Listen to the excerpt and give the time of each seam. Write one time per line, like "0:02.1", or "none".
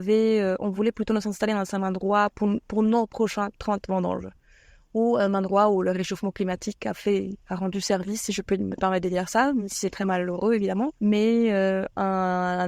0:11.0